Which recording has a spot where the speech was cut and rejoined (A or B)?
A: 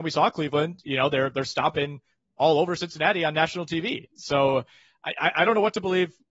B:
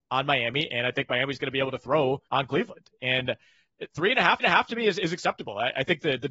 B